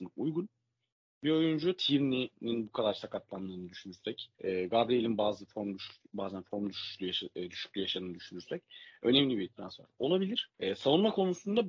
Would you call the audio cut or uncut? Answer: cut